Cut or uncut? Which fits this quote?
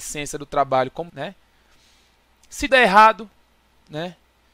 cut